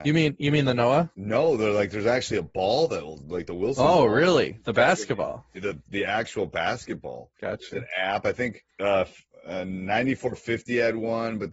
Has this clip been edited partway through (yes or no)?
yes